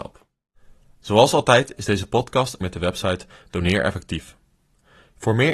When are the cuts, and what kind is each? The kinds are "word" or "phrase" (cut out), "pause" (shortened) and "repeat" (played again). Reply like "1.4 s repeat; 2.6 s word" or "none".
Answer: 2.6 s word